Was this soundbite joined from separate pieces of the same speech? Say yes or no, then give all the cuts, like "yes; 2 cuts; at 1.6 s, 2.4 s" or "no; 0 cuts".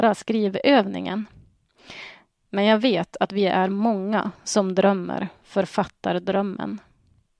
no; 0 cuts